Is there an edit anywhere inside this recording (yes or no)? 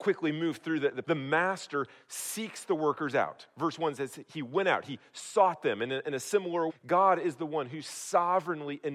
yes